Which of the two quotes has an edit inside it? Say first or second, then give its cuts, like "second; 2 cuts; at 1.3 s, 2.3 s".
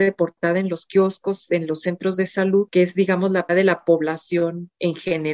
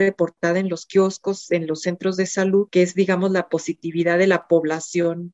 first; 1 cut; at 3.5 s